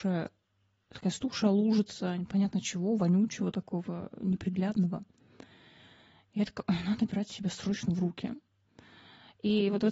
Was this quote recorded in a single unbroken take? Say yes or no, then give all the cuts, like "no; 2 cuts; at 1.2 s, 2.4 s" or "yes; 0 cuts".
yes; 0 cuts